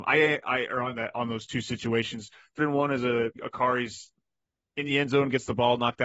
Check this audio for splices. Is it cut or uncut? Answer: cut